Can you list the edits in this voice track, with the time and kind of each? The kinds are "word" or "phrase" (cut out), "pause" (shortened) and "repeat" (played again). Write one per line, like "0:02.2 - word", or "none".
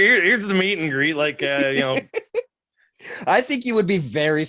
none